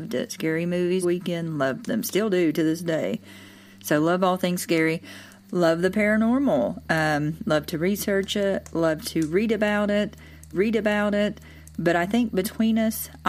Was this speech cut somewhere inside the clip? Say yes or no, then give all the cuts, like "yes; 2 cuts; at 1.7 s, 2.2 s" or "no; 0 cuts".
yes; 2 cuts; at 1.0 s, 10.5 s